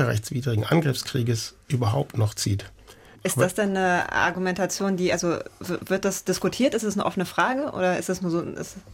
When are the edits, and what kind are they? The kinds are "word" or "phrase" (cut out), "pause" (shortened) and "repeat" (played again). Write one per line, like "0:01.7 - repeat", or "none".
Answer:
none